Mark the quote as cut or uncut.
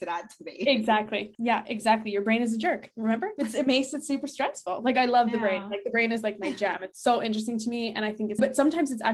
uncut